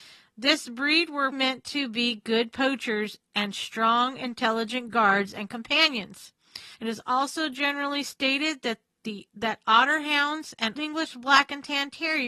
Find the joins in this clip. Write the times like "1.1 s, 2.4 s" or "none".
1.3 s, 6.7 s, 9.3 s, 10.8 s